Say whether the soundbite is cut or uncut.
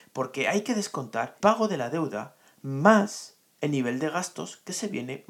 cut